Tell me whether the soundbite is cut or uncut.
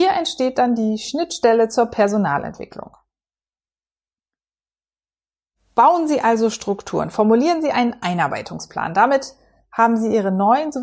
uncut